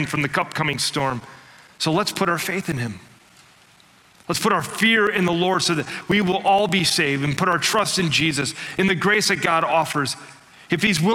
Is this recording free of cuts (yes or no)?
yes